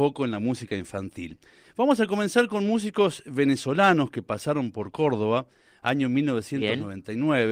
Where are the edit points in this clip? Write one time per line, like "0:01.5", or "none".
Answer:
none